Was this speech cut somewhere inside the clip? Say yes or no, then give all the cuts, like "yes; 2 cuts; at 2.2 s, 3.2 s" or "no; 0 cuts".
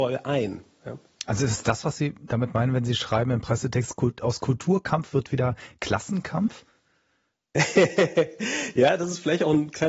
no; 0 cuts